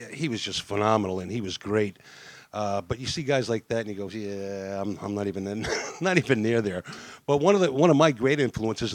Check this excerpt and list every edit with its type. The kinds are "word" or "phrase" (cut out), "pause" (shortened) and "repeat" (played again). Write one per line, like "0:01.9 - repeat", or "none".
none